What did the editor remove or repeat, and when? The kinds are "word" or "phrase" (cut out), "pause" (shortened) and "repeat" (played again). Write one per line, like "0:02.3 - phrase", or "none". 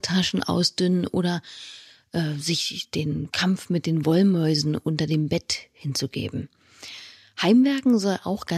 none

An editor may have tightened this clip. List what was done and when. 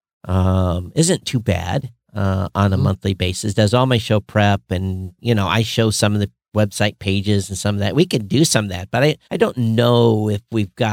0:09.2 - pause

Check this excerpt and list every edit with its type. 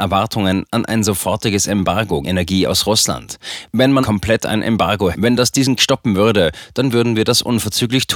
0:02.2 - word
0:04.0 - word
0:05.1 - word
0:05.8 - word

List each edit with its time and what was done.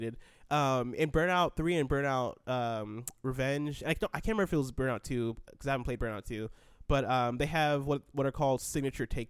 none

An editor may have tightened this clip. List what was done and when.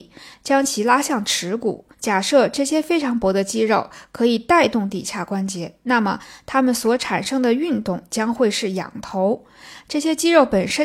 0:01.9 - pause

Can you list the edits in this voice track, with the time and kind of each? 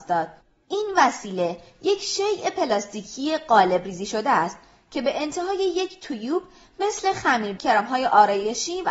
0:07.6 - word

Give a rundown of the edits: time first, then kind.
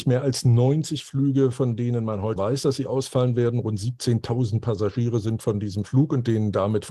0:02.4 - word

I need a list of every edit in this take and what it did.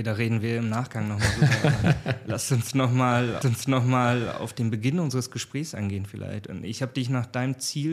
0:03.4 - repeat

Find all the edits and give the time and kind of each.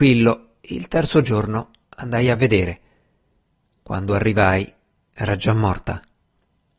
none

